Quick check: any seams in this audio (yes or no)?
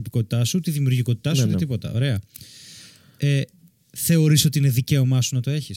no